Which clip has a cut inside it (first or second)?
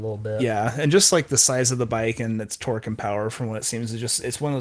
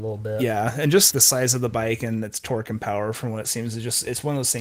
second